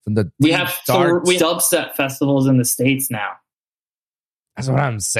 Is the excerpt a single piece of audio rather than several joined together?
no; 1 cut; at 1.4 s

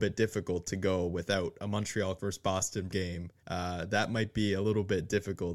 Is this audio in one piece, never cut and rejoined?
no; 3 cuts; at 2.2 s, 2.9 s, 3.4 s

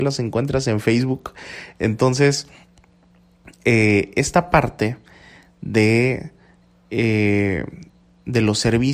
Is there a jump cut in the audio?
no; 0 cuts

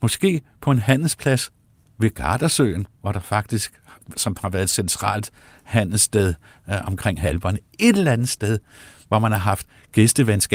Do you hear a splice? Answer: no; 0 cuts

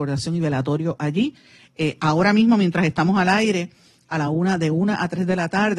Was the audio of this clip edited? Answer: no; 0 cuts

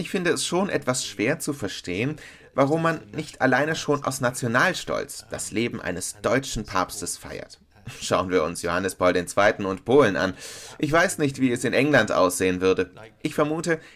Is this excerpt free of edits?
yes; 0 cuts

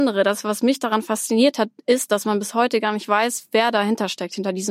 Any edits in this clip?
no; 0 cuts

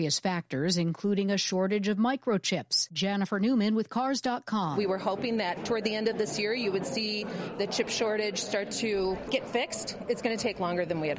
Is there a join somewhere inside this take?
no; 0 cuts

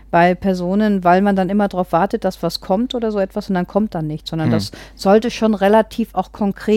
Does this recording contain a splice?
no; 0 cuts

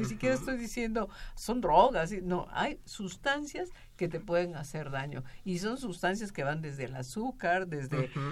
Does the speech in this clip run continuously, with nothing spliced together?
yes; 0 cuts

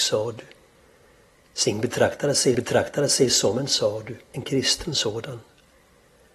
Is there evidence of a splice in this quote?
yes; 2 cuts; at 2.5 s, 4.3 s

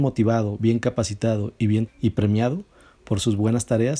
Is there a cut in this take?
yes; 1 cut; at 1.9 s

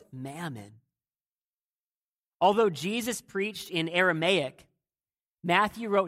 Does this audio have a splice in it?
no; 0 cuts

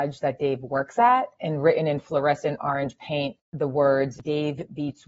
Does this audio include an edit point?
no; 0 cuts

